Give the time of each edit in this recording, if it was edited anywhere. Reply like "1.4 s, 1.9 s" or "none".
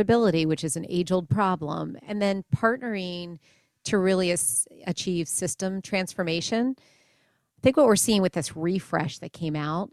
none